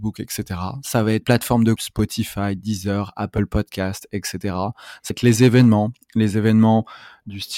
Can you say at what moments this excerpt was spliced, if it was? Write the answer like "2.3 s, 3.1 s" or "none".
1.2 s, 1.8 s, 5.1 s